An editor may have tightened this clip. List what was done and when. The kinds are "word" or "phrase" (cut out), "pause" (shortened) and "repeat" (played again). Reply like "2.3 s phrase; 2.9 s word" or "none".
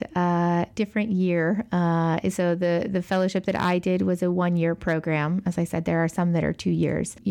none

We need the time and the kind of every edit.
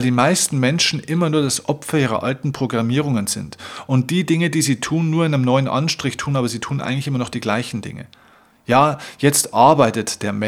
none

